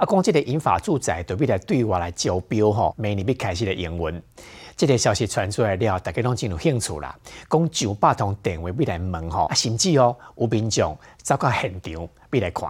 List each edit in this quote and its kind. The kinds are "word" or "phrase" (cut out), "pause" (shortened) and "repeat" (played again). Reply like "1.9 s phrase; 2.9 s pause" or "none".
2.9 s word; 9.5 s word